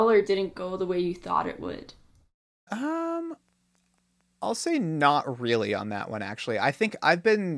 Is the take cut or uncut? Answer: uncut